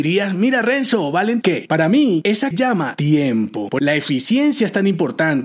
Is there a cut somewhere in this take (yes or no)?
yes